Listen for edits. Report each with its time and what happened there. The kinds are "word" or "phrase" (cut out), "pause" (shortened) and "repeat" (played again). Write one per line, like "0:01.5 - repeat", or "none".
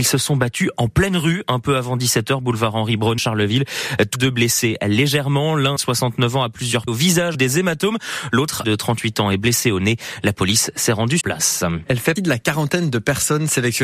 0:03.2 - word
0:04.1 - word
0:05.8 - word
0:06.9 - word
0:07.3 - word
0:08.6 - word
0:11.2 - word
0:12.2 - word